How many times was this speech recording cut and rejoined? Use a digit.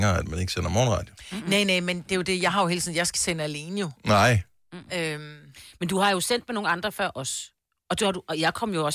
1